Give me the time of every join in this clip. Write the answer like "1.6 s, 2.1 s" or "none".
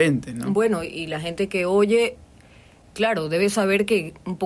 2.8 s